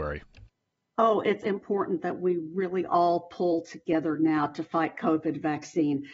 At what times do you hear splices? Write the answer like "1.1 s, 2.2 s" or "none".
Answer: 1.4 s